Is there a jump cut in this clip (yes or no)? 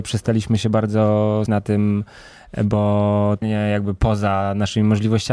yes